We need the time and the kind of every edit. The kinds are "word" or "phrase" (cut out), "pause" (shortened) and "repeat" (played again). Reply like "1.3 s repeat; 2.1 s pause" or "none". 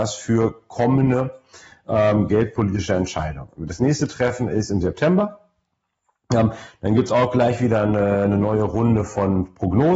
none